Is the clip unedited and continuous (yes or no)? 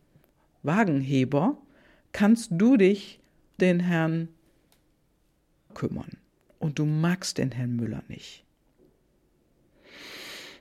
no